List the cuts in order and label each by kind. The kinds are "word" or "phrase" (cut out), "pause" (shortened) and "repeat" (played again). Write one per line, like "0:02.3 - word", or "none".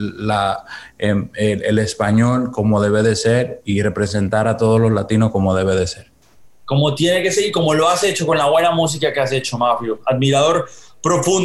none